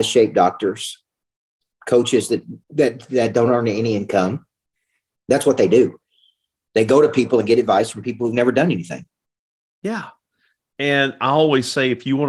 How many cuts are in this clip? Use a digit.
1